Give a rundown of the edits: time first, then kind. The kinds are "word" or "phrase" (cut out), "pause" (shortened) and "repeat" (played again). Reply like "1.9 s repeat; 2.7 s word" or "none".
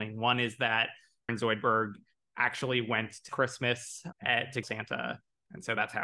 1.3 s word; 3.3 s word; 4.6 s word